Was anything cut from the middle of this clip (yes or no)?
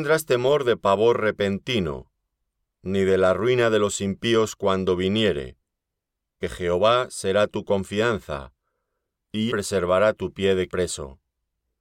yes